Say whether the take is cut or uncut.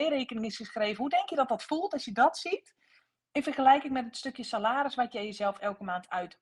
uncut